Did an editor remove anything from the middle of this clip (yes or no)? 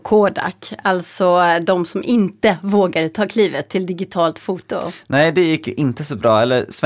no